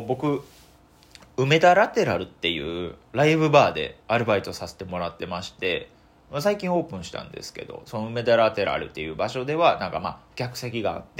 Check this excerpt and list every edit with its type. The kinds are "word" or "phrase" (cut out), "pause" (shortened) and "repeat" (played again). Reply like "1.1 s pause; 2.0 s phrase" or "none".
4.0 s pause

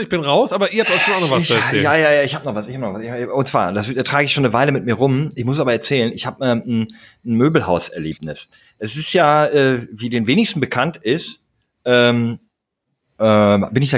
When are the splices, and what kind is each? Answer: none

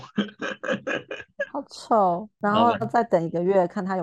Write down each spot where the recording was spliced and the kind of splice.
2.8 s word

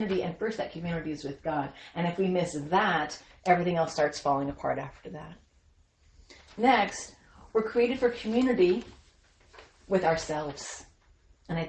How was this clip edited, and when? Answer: none

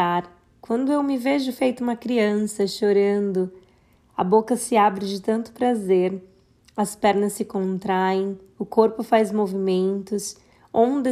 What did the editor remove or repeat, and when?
none

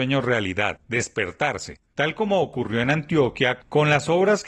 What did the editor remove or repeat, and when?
none

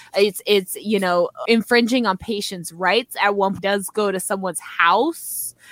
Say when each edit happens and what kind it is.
1.4 s word; 3.6 s phrase

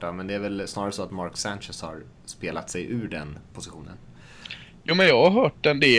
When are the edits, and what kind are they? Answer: none

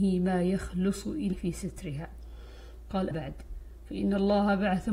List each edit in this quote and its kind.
1.3 s word; 3.1 s word

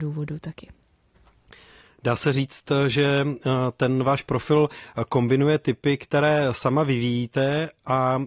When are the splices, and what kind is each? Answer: none

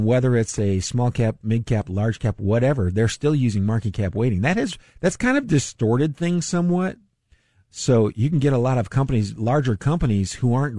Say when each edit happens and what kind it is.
4.9 s pause

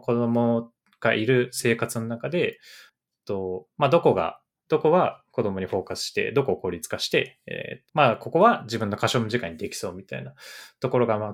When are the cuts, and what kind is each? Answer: 7.9 s word

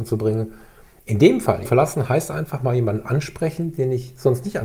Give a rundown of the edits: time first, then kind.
1.6 s phrase

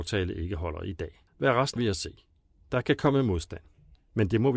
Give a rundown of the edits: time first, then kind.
1.3 s pause; 1.8 s phrase

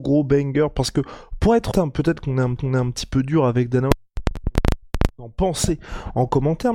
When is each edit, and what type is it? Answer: 1.7 s word; 2.6 s repeat

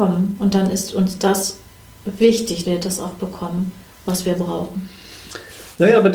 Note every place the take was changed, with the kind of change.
2.6 s word

